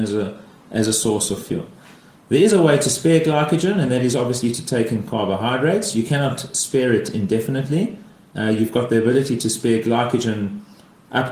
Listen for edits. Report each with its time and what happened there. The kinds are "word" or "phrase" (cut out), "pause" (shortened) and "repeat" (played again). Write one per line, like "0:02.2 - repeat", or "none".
none